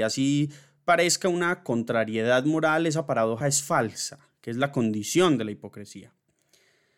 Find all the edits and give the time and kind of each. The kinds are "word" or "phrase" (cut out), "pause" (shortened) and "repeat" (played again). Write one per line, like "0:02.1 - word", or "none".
0:03.4 - word